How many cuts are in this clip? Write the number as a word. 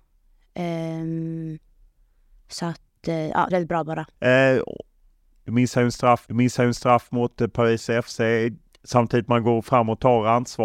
three